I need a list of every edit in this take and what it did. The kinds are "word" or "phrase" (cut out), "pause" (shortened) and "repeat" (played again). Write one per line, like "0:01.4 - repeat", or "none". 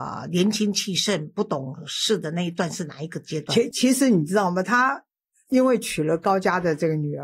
none